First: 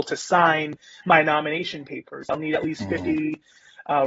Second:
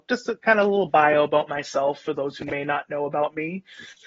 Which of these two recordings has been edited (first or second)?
second